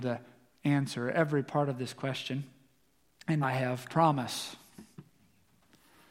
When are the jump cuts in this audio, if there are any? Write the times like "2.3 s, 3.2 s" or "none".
3.4 s, 3.9 s